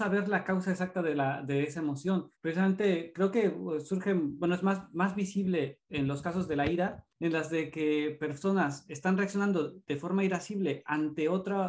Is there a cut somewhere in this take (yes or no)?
yes